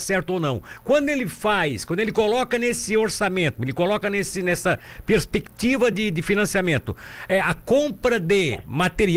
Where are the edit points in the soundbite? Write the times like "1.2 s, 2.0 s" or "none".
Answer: none